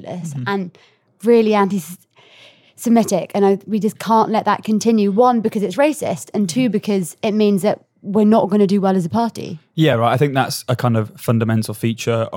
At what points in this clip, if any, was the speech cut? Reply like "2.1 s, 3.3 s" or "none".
none